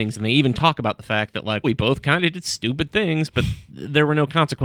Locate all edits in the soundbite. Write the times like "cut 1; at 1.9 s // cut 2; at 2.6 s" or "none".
cut 1; at 1.6 s // cut 2; at 3.6 s